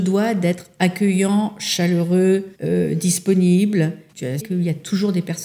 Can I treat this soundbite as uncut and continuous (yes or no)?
no